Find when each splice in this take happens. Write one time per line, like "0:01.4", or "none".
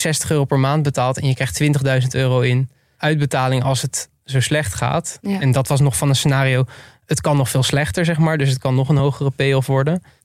none